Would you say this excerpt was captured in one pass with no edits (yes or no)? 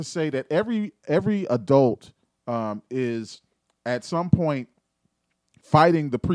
yes